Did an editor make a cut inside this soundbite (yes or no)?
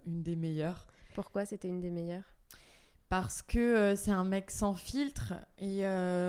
no